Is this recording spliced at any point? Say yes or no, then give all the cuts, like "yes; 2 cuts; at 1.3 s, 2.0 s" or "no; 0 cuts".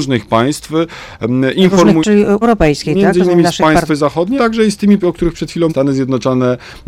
yes; 6 cuts; at 2.0 s, 2.4 s, 3.9 s, 4.4 s, 5.0 s, 5.7 s